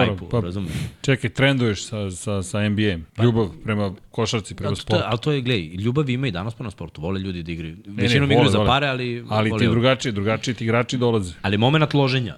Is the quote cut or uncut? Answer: cut